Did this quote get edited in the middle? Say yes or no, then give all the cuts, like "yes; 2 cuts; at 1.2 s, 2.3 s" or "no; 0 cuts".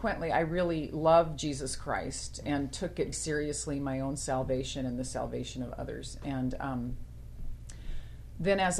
yes; 1 cut; at 3.1 s